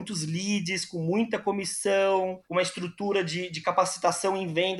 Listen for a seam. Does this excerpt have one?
yes; 1 cut; at 2.4 s

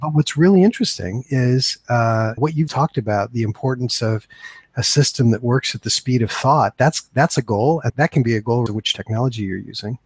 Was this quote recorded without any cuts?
no; 4 cuts; at 2.4 s, 2.7 s, 7.9 s, 8.7 s

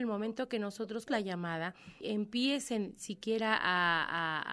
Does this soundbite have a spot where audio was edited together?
yes; 2 cuts; at 1.1 s, 2.0 s

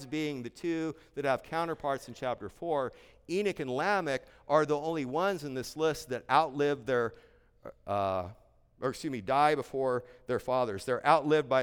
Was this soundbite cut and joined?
no; 0 cuts

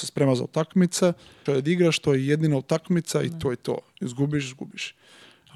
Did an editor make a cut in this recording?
yes; 1 cut; at 1.5 s

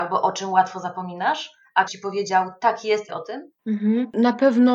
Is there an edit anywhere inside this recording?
yes; 2 cuts; at 1.9 s, 3.1 s

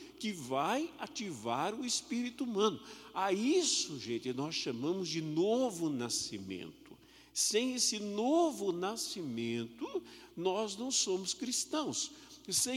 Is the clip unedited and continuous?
yes; 0 cuts

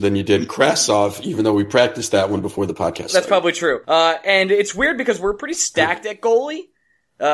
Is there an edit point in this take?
yes; 1 cut; at 3.8 s

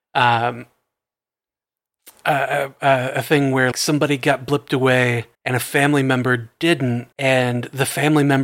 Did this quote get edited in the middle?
yes; 3 cuts; at 3.7 s, 5.3 s, 7.1 s

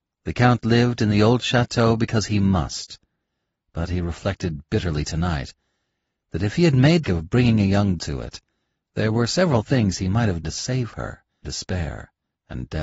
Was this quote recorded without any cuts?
no; 4 cuts; at 7.0 s, 8.0 s, 10.4 s, 11.4 s

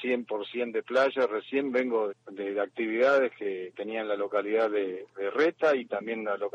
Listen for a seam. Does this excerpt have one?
yes; 2 cuts; at 2.1 s, 3.7 s

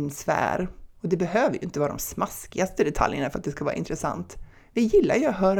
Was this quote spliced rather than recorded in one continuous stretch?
no; 0 cuts

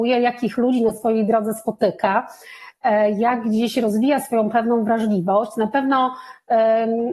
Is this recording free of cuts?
yes; 0 cuts

